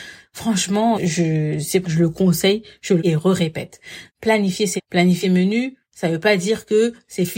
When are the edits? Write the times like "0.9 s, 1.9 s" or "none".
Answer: 0.9 s, 1.8 s, 3.0 s, 4.1 s, 4.8 s, 5.2 s